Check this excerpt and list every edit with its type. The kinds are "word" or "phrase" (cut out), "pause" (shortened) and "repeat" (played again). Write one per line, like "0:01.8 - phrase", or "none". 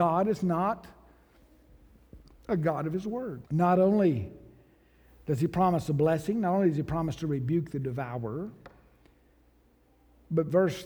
0:03.5 - pause

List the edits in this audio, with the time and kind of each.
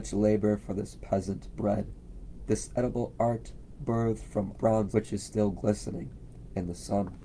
0:04.5 - word
0:04.9 - word

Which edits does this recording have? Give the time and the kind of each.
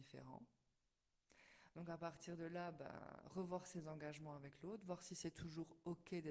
none

